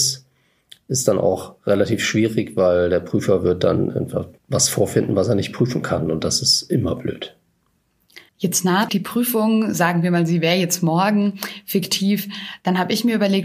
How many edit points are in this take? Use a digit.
3